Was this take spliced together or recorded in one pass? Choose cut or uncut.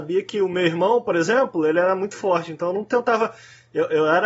uncut